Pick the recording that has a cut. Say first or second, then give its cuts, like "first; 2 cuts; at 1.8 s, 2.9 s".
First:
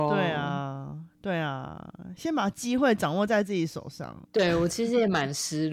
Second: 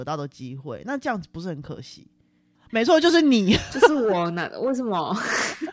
first; 1 cut; at 4.3 s